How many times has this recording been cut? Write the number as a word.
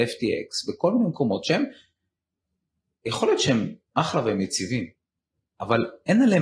zero